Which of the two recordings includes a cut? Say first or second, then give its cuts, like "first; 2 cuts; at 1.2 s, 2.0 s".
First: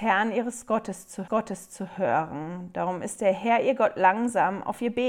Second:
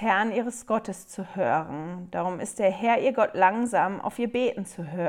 first; 1 cut; at 1.3 s